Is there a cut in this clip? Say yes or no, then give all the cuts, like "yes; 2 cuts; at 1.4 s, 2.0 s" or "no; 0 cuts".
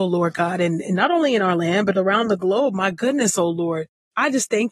no; 0 cuts